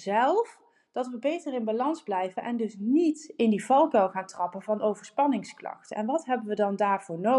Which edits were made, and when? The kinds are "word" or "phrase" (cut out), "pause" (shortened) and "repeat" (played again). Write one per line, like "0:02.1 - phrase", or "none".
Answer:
none